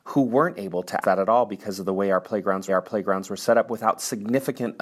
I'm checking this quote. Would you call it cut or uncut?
cut